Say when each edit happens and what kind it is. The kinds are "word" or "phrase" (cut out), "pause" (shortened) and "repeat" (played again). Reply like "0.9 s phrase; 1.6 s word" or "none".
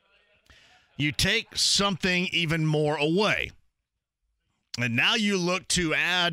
none